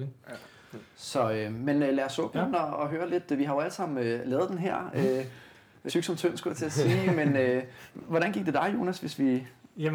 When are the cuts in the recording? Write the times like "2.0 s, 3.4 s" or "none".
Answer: 5.9 s

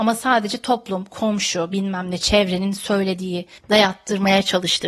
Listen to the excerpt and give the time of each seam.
3.6 s

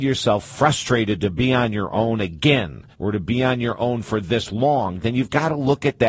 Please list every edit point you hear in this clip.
2.9 s

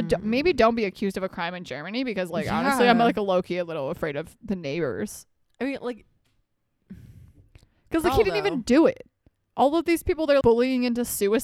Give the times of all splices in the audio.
10.4 s

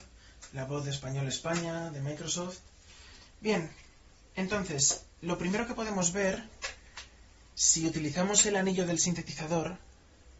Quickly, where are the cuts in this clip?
none

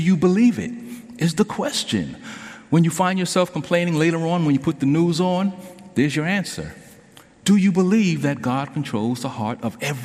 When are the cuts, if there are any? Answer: none

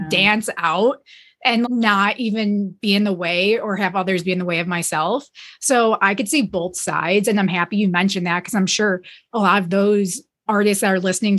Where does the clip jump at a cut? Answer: 1.6 s, 10.5 s

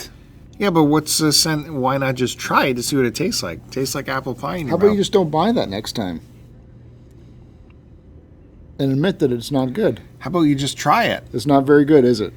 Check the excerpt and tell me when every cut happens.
none

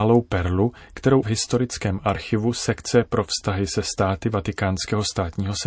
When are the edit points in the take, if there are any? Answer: 1.2 s

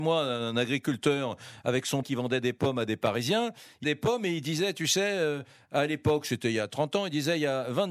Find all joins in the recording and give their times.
2.0 s, 3.8 s

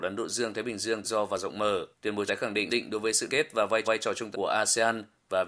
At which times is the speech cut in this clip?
1.0 s, 1.9 s, 2.3 s, 2.7 s, 3.3 s, 3.8 s, 4.3 s

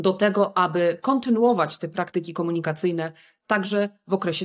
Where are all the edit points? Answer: none

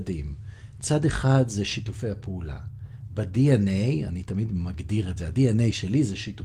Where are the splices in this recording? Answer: none

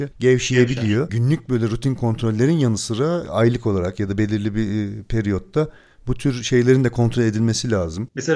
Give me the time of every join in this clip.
none

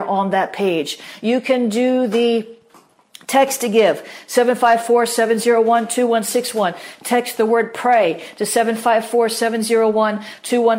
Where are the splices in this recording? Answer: none

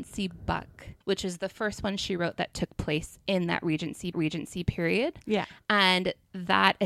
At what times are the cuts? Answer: 1.0 s, 4.1 s

